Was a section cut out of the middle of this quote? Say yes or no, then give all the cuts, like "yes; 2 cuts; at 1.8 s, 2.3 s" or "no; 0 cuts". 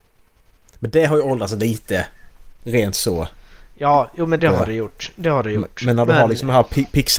yes; 1 cut; at 4.4 s